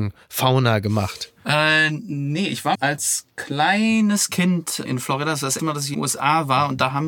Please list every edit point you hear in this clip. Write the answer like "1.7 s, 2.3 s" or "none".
2.7 s, 4.8 s, 5.6 s, 5.9 s